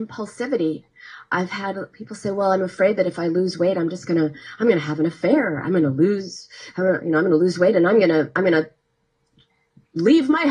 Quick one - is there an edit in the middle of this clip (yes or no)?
no